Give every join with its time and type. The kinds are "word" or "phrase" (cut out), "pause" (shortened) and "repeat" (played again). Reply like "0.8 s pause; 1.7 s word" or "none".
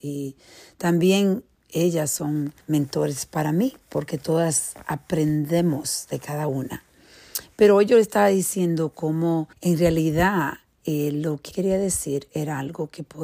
2.6 s pause; 9.5 s pause; 11.5 s word